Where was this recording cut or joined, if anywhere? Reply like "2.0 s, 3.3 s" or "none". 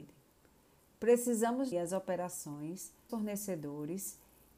1.7 s, 3.1 s